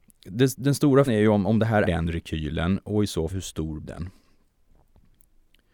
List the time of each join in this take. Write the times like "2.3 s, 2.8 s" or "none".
1.1 s, 1.8 s, 3.3 s, 3.8 s